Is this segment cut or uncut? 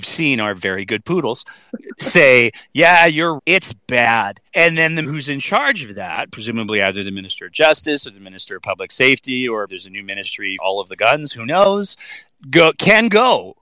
cut